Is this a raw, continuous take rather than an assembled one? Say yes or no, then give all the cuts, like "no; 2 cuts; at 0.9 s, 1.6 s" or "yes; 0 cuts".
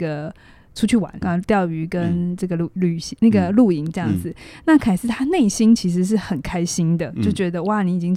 no; 1 cut; at 1.2 s